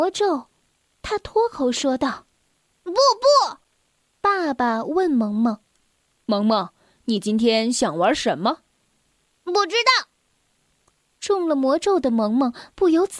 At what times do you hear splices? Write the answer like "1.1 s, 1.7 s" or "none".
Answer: none

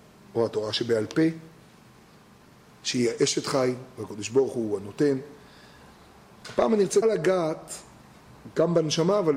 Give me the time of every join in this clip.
7.0 s

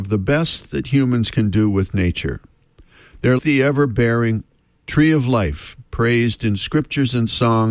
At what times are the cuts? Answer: 3.4 s

